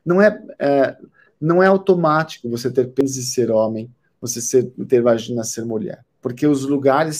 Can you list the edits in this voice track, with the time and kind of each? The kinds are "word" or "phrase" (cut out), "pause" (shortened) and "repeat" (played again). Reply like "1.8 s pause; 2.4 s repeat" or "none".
none